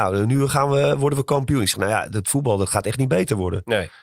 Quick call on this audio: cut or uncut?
uncut